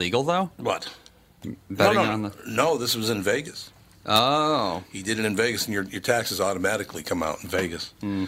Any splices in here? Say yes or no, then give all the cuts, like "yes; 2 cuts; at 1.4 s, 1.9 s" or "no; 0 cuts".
no; 0 cuts